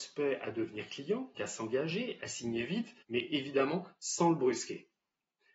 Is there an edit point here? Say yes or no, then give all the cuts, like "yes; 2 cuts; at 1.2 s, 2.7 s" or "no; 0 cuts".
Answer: yes; 2 cuts; at 1.3 s, 3.0 s